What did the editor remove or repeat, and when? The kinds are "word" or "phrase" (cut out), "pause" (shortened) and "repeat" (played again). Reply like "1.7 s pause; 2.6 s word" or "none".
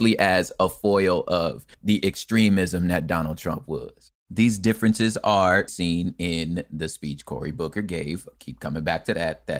1.7 s pause; 4.2 s pause; 5.7 s word